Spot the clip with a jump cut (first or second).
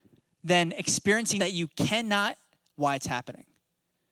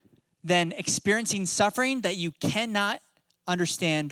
first